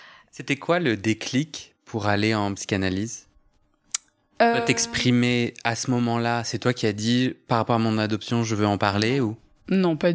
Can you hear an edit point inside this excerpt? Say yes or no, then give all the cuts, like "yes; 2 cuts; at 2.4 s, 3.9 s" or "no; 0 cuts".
no; 0 cuts